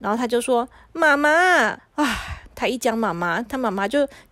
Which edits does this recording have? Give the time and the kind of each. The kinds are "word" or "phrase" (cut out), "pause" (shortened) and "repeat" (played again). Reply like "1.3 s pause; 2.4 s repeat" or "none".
1.8 s pause